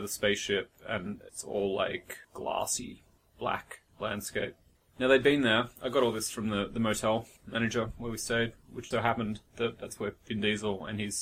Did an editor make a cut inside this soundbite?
yes; 7 cuts; at 1.3 s, 2.2 s, 3.9 s, 5.8 s, 7.4 s, 8.9 s, 10.2 s

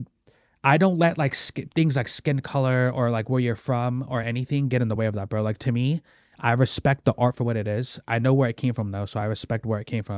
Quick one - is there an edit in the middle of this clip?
no; 0 cuts

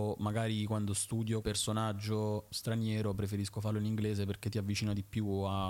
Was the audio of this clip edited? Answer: yes; 2 cuts; at 1.4 s, 2.5 s

